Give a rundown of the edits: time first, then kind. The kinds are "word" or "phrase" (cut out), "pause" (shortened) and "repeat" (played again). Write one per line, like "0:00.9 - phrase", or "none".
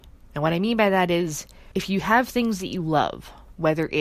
0:01.7 - pause